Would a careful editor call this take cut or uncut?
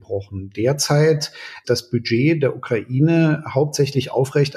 cut